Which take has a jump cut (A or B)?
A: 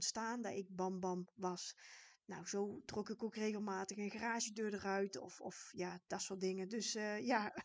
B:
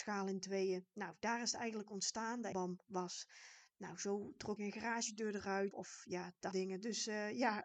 B